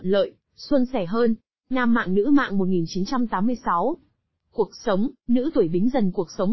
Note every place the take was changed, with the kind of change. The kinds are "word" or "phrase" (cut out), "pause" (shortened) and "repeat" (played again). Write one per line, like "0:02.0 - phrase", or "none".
0:01.4 - pause